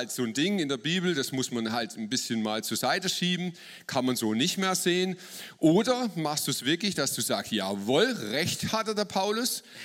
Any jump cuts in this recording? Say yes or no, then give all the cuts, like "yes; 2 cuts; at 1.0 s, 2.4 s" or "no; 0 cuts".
no; 0 cuts